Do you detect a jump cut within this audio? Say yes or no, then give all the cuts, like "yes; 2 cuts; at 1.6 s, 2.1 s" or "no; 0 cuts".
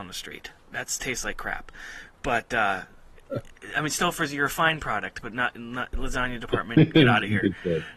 no; 0 cuts